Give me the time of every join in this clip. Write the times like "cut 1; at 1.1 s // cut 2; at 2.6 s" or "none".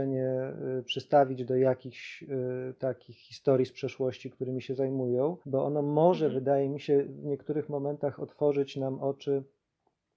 cut 1; at 5.4 s